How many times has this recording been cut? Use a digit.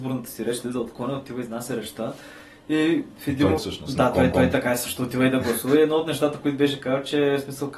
2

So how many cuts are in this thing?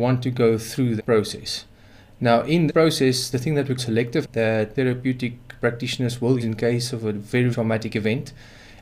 8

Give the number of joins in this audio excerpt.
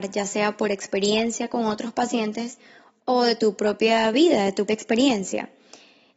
1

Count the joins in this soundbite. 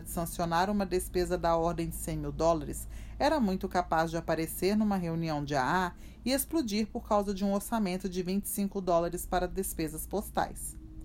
0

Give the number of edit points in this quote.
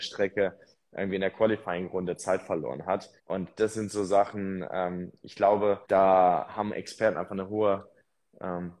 2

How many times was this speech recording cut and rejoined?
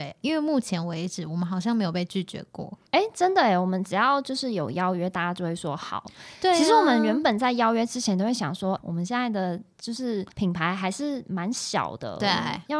3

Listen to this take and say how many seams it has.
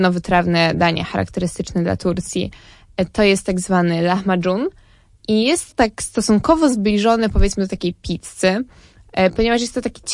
1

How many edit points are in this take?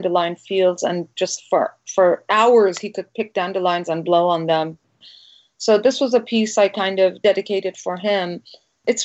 0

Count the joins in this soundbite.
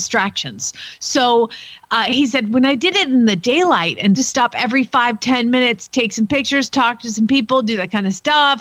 1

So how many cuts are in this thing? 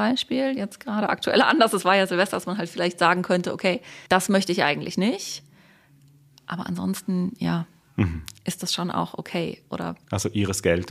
1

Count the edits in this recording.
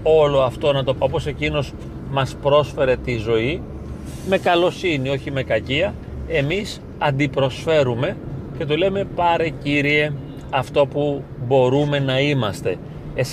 1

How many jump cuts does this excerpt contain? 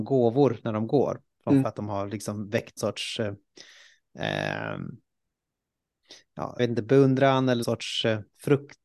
4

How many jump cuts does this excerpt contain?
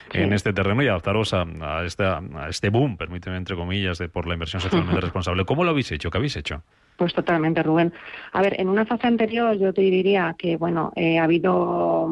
1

